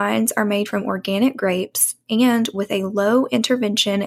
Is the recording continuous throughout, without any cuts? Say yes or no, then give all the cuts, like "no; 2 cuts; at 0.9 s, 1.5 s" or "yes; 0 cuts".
yes; 0 cuts